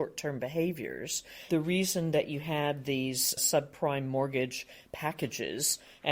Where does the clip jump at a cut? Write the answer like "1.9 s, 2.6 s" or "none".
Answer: none